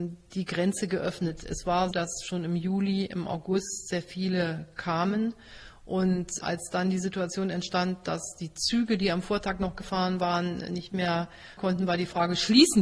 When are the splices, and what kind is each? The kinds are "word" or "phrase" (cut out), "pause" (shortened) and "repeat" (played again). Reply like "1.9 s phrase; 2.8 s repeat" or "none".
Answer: 1.9 s word; 6.4 s word; 11.6 s word